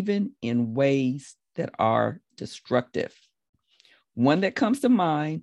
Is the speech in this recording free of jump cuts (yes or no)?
yes